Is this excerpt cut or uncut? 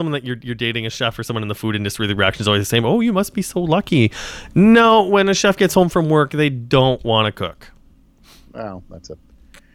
uncut